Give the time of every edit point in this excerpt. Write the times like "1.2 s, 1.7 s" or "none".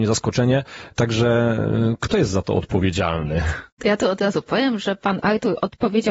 none